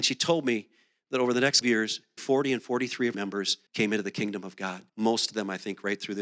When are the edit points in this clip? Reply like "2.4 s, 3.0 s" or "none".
1.6 s, 2.2 s, 3.1 s, 3.7 s, 4.9 s